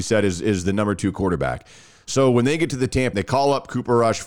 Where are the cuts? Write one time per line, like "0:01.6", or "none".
0:03.1